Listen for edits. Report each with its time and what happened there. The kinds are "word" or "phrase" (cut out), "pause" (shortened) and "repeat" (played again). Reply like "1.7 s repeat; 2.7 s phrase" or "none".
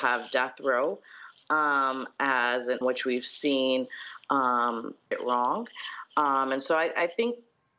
2.8 s word; 5.1 s phrase